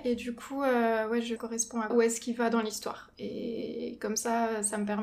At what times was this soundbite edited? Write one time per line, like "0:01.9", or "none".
0:01.4
0:01.9